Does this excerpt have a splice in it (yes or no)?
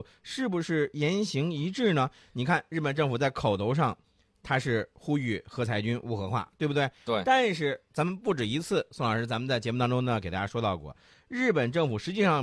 no